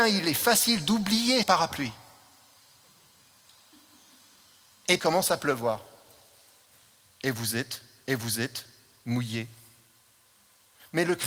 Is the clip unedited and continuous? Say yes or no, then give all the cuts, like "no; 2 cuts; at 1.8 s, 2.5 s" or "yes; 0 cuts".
no; 3 cuts; at 1.4 s, 5.0 s, 8.1 s